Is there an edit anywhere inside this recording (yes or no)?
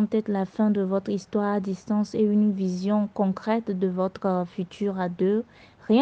no